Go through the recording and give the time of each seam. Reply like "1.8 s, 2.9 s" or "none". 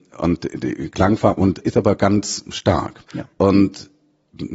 1.6 s, 3.1 s